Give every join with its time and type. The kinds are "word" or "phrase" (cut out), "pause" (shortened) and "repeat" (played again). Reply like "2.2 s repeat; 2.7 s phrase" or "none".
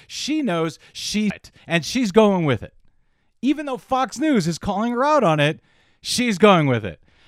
1.3 s word